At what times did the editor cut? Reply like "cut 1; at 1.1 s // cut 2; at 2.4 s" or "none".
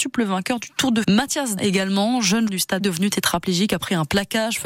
cut 1; at 1.0 s // cut 2; at 1.6 s // cut 3; at 2.5 s // cut 4; at 2.8 s